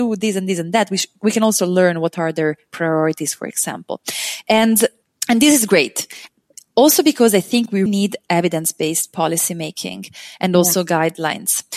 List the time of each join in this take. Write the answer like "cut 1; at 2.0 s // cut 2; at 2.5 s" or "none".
cut 1; at 5.0 s // cut 2; at 7.9 s